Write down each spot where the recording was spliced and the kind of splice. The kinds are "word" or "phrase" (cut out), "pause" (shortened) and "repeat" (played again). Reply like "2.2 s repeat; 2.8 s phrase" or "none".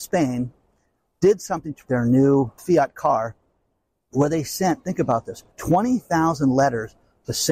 1.9 s word; 2.6 s word; 5.5 s pause